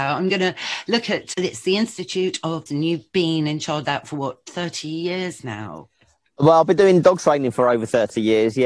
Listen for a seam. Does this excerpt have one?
yes; 2 cuts; at 2.7 s, 3.8 s

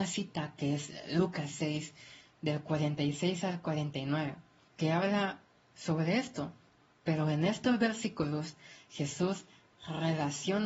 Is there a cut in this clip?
no; 0 cuts

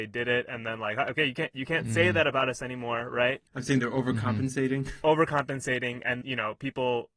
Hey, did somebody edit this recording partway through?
yes; 2 cuts; at 3.5 s, 6.2 s

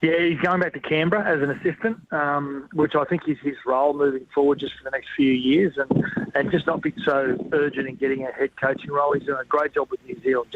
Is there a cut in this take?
yes; 1 cut; at 2.0 s

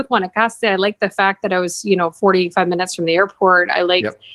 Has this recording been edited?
no; 0 cuts

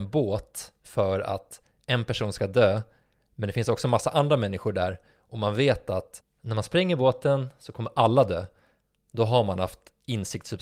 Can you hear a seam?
no; 0 cuts

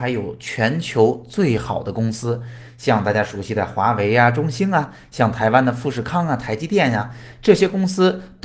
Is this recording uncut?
yes; 0 cuts

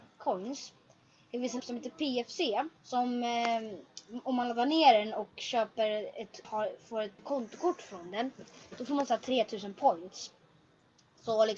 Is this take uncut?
no; 4 cuts; at 1.6 s, 2.8 s, 6.4 s, 7.2 s

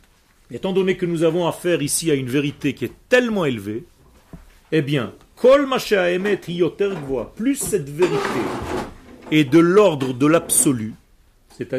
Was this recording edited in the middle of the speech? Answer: no; 0 cuts

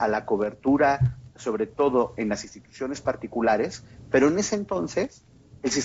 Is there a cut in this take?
no; 0 cuts

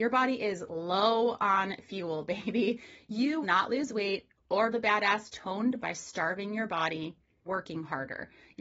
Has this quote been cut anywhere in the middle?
yes; 4 cuts; at 3.4 s, 4.7 s, 5.8 s, 7.5 s

